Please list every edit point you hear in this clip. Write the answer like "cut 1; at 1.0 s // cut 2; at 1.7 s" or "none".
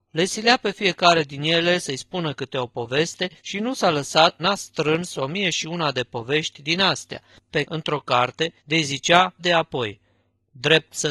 cut 1; at 3.4 s // cut 2; at 4.4 s // cut 3; at 7.6 s // cut 4; at 8.6 s // cut 5; at 9.4 s